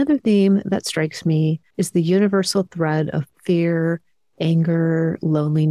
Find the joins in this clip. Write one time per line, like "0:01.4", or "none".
0:01.7